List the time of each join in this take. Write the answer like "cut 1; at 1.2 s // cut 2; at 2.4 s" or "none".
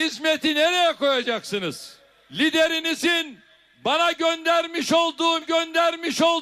cut 1; at 5.4 s